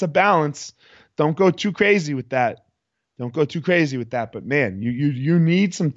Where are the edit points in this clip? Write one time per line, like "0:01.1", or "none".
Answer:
none